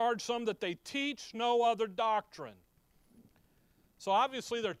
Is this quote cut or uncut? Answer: uncut